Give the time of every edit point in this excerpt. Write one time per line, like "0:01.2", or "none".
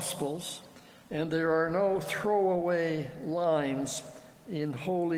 none